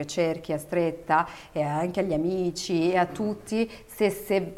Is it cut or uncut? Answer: uncut